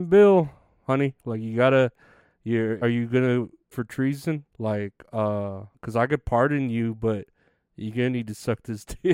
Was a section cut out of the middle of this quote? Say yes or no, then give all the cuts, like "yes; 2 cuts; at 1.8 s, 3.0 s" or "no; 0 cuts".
yes; 4 cuts; at 2.8 s, 3.7 s, 4.5 s, 5.7 s